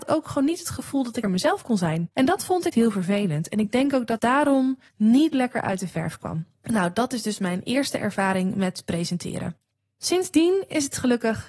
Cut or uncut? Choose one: cut